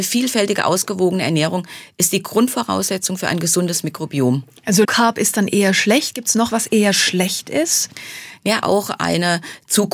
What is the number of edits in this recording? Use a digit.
3